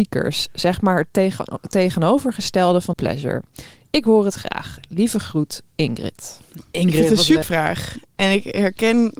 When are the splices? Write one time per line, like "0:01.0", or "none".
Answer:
0:02.9
0:05.7
0:07.4